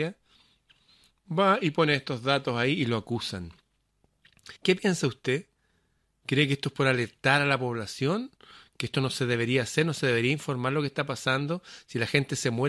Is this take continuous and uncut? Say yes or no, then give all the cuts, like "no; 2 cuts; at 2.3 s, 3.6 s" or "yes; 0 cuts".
no; 1 cut; at 4.6 s